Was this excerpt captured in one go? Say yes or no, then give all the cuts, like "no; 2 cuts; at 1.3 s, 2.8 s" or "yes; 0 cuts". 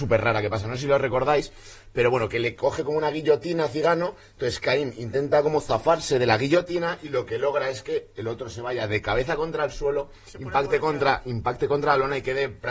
yes; 0 cuts